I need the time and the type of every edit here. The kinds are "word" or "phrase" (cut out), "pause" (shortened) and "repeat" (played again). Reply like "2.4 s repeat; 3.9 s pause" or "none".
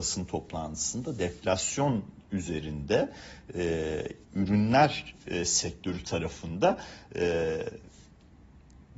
4.2 s pause